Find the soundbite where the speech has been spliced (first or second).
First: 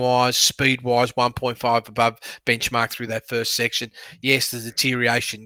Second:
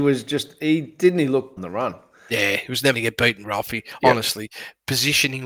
second